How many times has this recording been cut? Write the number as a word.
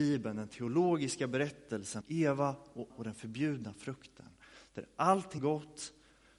three